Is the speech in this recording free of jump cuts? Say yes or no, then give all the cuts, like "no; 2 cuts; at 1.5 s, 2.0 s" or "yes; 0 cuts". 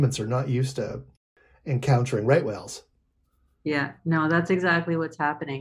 yes; 0 cuts